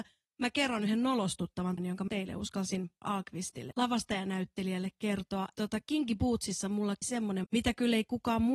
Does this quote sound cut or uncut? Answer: cut